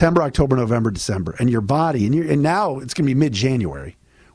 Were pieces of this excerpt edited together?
no; 0 cuts

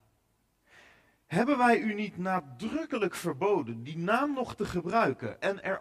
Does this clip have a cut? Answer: no; 0 cuts

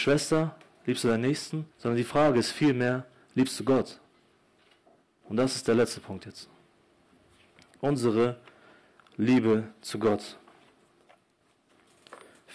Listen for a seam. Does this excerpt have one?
yes; 1 cut; at 1.7 s

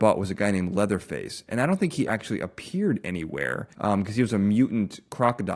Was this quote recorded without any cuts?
no; 2 cuts; at 2.1 s, 3.7 s

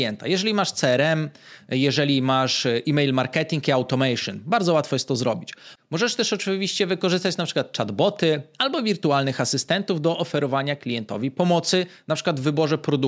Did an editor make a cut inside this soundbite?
no; 0 cuts

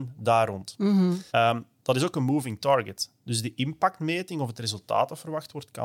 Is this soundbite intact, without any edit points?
no; 1 cut; at 1.3 s

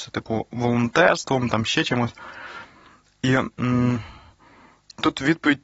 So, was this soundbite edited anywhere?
no; 0 cuts

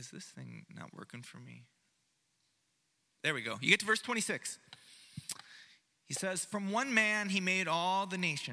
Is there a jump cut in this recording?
no; 0 cuts

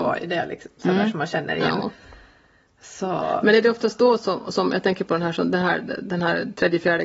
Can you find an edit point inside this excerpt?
no; 0 cuts

